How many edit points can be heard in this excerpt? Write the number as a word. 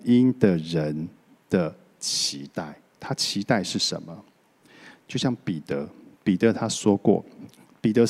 zero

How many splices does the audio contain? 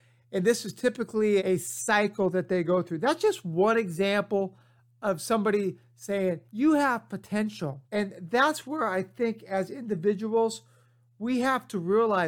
three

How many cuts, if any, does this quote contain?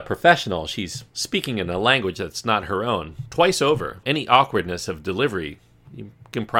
one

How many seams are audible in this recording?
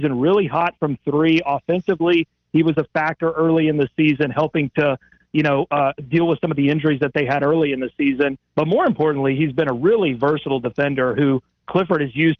one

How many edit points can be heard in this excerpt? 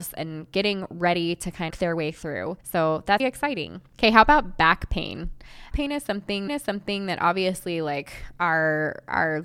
five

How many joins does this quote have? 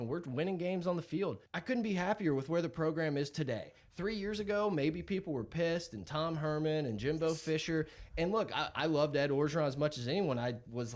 one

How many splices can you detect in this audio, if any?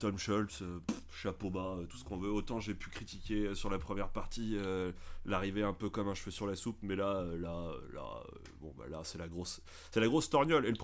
zero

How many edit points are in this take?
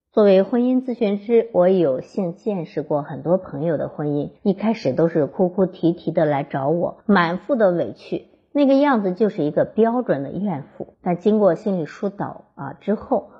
three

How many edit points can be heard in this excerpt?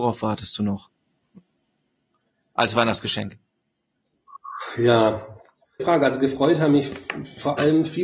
one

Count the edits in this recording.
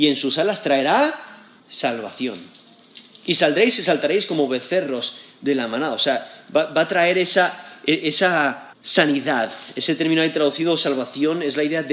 two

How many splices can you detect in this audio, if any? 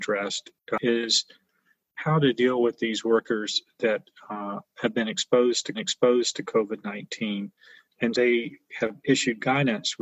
two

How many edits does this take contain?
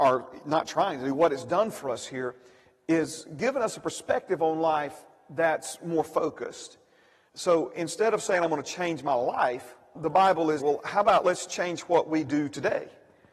two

